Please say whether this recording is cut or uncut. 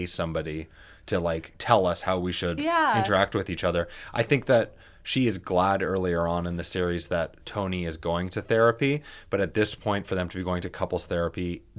uncut